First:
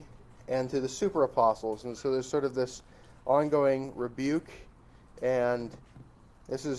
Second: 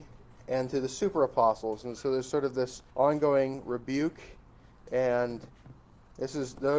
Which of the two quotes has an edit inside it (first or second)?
second